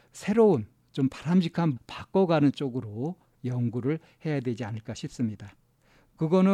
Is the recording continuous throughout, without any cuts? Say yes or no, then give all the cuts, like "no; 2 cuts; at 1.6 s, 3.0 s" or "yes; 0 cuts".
no; 1 cut; at 1.8 s